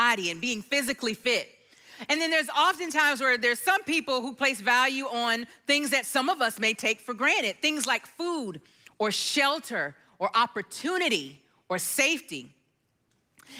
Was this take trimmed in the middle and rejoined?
no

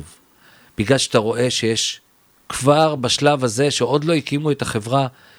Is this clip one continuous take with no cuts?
yes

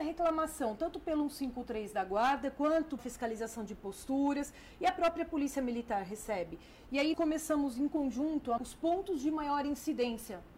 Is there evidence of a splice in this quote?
yes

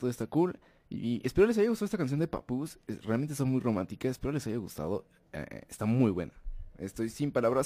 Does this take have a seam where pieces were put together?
no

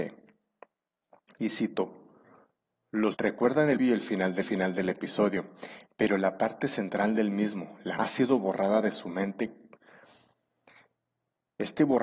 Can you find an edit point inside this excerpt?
yes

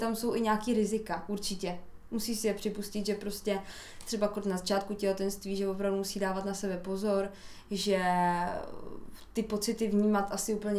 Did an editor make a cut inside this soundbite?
no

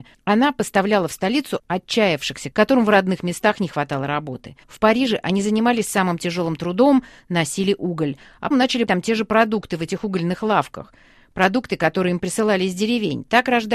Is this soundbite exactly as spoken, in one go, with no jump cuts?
no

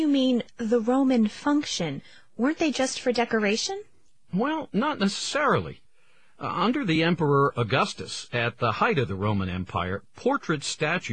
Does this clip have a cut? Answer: no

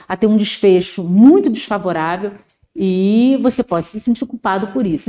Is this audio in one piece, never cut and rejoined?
yes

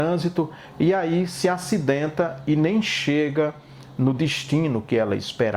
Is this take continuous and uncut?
yes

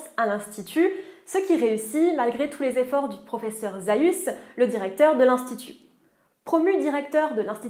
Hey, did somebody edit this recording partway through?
no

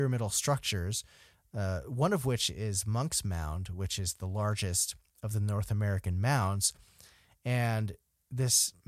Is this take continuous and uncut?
yes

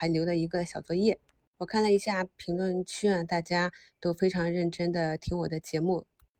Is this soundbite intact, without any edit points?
yes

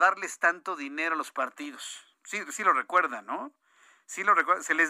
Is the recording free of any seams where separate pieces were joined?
yes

